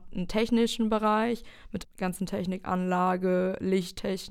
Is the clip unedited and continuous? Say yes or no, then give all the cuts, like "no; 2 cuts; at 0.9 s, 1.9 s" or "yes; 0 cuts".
no; 1 cut; at 1.8 s